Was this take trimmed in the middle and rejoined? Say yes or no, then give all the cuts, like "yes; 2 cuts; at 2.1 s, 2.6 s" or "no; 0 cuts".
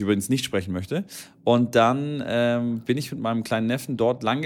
no; 0 cuts